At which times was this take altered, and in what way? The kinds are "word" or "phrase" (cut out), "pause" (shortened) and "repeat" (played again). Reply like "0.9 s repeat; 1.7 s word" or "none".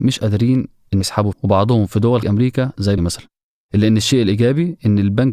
1.0 s word; 1.3 s word; 2.2 s word; 3.0 s word